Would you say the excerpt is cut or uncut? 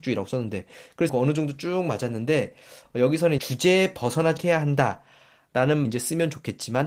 cut